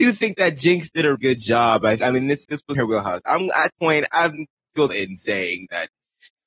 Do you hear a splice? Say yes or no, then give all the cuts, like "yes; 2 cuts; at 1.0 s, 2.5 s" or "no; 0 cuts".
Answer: yes; 6 cuts; at 1.1 s, 2.0 s, 2.4 s, 2.7 s, 3.7 s, 4.9 s